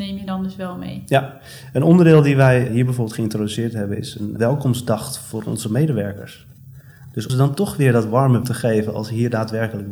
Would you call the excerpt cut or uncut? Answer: cut